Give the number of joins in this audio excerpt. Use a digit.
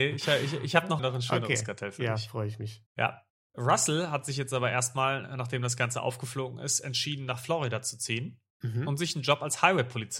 3